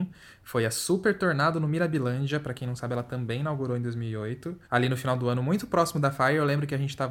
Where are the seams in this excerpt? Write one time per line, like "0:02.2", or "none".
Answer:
0:04.6